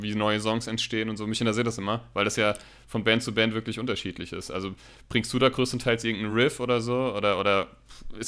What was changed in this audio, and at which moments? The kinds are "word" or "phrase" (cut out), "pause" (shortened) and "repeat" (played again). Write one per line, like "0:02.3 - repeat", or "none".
none